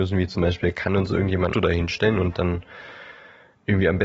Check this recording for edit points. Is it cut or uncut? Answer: cut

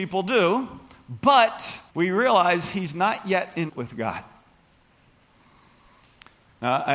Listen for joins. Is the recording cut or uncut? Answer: cut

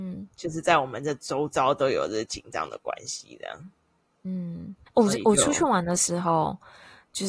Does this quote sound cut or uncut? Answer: cut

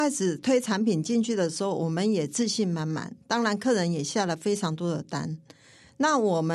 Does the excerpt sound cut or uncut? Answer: uncut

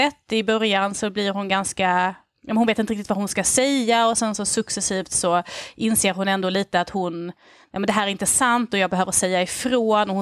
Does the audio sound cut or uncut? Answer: uncut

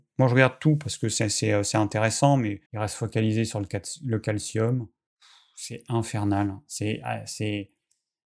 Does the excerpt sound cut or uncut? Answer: cut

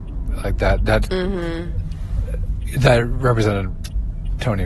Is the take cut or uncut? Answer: cut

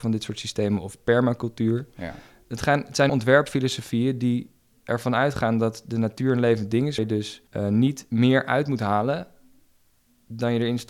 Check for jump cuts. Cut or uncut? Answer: cut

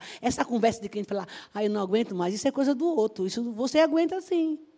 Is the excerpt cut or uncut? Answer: uncut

